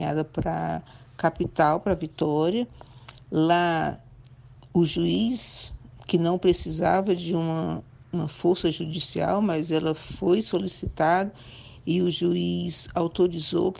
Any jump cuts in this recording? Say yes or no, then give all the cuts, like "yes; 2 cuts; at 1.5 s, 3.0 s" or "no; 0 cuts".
no; 0 cuts